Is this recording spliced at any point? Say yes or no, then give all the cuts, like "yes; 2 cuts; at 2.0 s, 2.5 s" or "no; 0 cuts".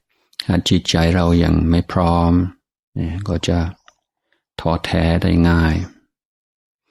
no; 0 cuts